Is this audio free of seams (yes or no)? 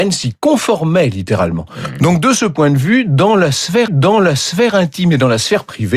no